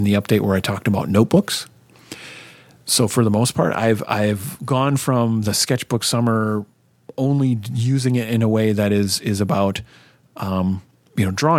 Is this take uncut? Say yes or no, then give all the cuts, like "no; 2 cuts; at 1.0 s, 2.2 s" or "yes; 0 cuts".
yes; 0 cuts